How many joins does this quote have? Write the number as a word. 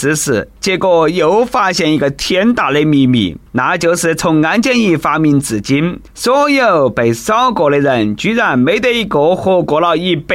two